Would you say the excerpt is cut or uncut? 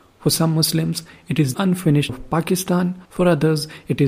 cut